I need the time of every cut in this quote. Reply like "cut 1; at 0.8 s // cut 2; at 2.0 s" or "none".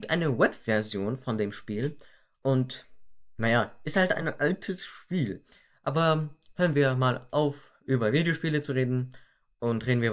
none

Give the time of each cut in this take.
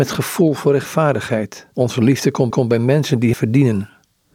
cut 1; at 1.7 s // cut 2; at 2.5 s // cut 3; at 3.3 s

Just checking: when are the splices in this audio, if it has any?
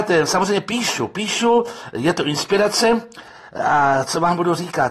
none

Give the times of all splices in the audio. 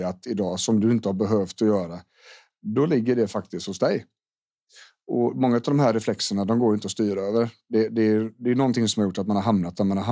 none

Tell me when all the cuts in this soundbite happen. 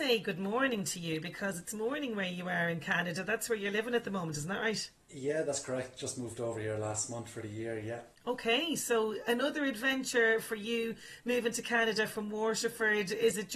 cut 1; at 5.0 s // cut 2; at 8.2 s

